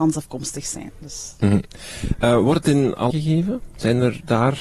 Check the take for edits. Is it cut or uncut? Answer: cut